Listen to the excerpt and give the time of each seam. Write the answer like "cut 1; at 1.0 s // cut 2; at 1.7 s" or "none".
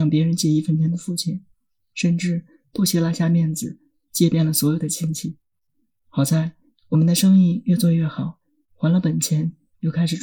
none